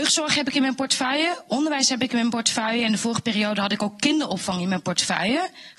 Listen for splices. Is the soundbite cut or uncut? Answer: uncut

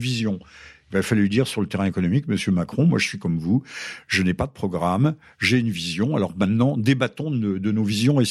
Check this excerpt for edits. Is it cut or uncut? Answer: uncut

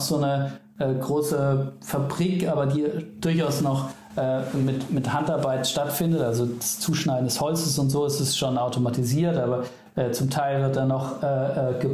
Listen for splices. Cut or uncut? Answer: uncut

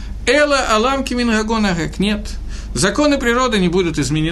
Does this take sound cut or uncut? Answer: uncut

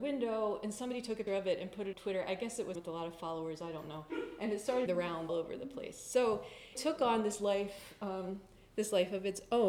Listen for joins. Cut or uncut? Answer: cut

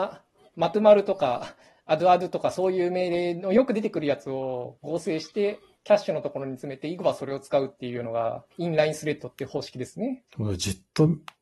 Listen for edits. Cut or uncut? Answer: cut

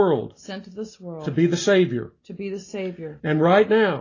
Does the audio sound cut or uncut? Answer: uncut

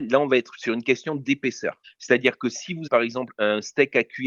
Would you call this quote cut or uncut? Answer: cut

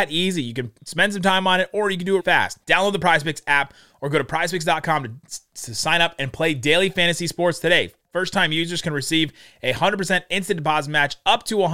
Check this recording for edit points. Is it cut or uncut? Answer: cut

